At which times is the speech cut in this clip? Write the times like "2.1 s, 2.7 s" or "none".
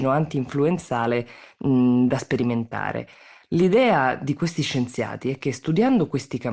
none